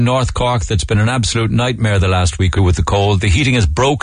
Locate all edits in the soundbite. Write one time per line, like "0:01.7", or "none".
0:02.6